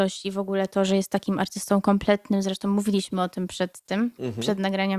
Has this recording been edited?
no; 0 cuts

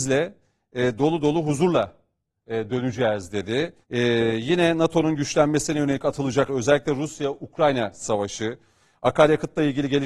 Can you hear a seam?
yes; 2 cuts; at 3.8 s, 6.5 s

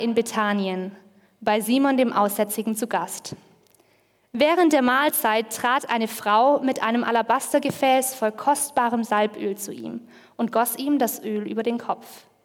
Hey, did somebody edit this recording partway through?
no; 0 cuts

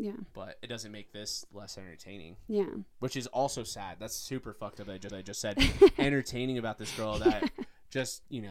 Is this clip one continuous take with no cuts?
no; 1 cut; at 5.1 s

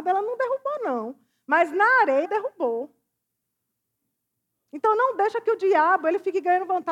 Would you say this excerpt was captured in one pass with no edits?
no; 1 cut; at 2.2 s

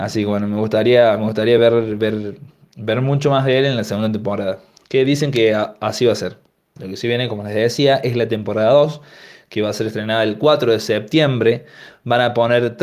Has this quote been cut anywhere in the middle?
no; 0 cuts

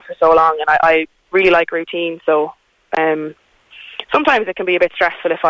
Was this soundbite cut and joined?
no; 0 cuts

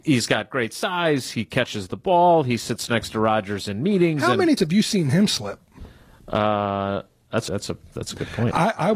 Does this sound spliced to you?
yes; 2 cuts; at 4.6 s, 7.5 s

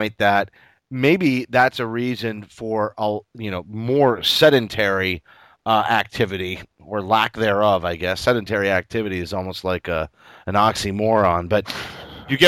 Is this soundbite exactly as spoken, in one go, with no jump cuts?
yes; 0 cuts

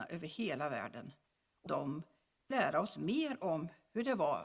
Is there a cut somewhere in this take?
yes; 2 cuts; at 1.7 s, 2.5 s

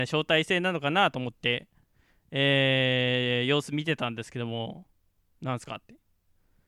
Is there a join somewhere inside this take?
no; 0 cuts

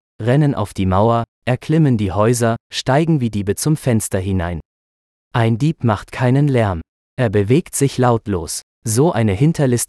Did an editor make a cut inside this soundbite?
no; 0 cuts

